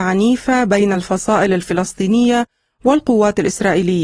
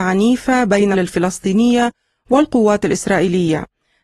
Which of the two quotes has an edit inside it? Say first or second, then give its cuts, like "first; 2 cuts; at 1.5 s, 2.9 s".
second; 1 cut; at 0.9 s